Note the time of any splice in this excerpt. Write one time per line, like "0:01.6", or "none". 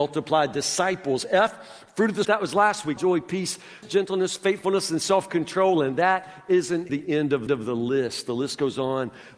0:02.2
0:03.0
0:03.8
0:06.9
0:07.5